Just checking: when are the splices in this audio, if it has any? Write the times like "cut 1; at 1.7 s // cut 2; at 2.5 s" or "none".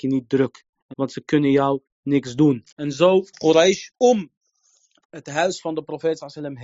cut 1; at 0.9 s // cut 2; at 2.7 s // cut 3; at 3.3 s // cut 4; at 3.9 s